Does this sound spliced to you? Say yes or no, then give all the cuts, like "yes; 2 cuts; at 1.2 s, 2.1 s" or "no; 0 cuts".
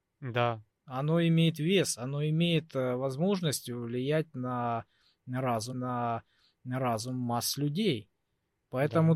yes; 1 cut; at 5.7 s